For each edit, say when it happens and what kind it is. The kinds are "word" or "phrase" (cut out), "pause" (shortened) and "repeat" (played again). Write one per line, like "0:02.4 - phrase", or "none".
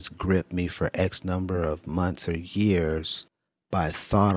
none